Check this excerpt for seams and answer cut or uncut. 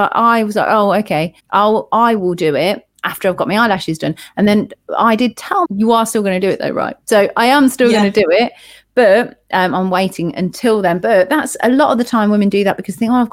cut